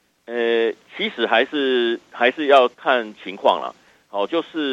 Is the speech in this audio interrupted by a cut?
yes; 1 cut; at 2.7 s

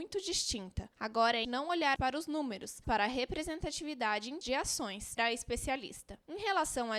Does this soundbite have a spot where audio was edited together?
yes; 5 cuts; at 1.4 s, 2.0 s, 2.8 s, 4.4 s, 5.2 s

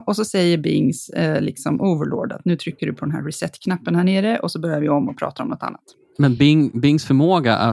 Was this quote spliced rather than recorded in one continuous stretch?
no; 0 cuts

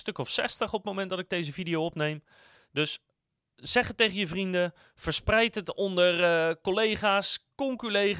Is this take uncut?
yes; 0 cuts

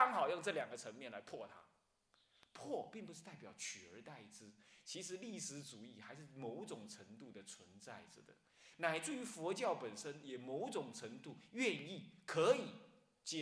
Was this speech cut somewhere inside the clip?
no; 0 cuts

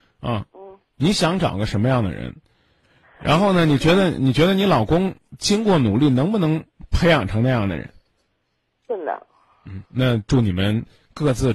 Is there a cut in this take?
yes; 1 cut; at 9.9 s

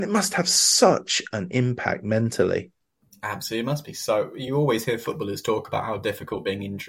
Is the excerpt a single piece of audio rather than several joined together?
yes; 0 cuts

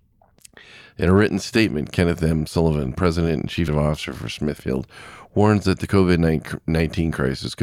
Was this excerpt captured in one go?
no; 1 cut; at 3.7 s

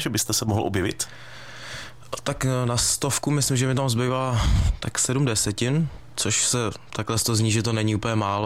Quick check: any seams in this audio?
no; 0 cuts

